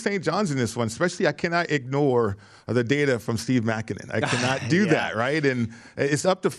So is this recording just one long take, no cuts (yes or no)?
yes